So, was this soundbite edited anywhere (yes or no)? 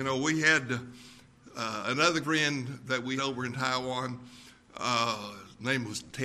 yes